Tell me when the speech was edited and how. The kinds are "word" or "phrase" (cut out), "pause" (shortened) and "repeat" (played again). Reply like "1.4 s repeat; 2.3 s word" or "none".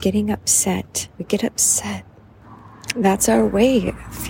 1.1 s pause

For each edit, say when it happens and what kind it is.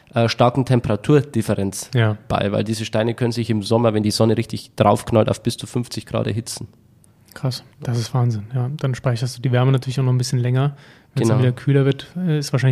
7.7 s pause

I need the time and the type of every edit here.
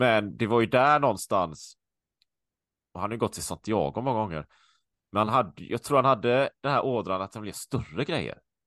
none

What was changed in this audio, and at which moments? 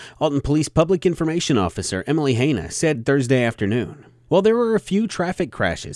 none

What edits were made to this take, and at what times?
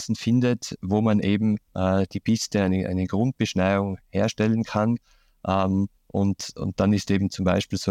1.7 s pause; 6.0 s pause

